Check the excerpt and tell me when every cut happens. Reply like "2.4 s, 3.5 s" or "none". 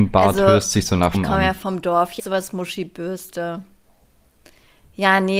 1.1 s, 2.2 s

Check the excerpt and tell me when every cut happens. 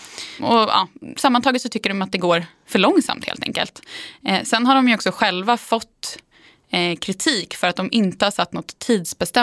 none

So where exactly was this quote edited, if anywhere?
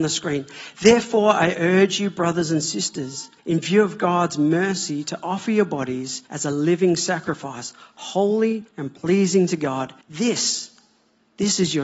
3.4 s, 6.3 s, 8.7 s, 10.0 s

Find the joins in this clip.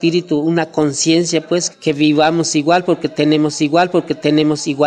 1.7 s, 3.6 s

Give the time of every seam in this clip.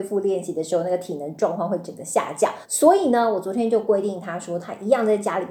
2.6 s

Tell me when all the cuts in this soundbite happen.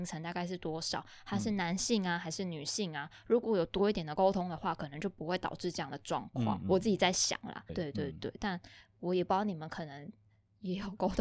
7.7 s

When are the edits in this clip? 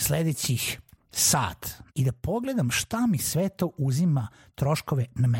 1.9 s

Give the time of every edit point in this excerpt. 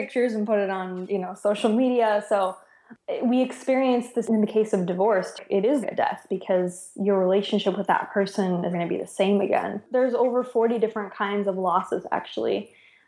4.2 s, 5.8 s, 8.7 s

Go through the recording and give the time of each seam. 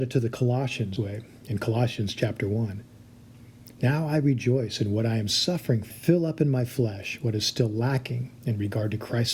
1.0 s, 3.7 s, 5.9 s

